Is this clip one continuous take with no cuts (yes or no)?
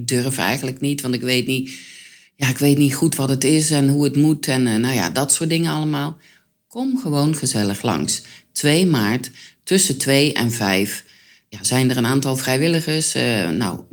yes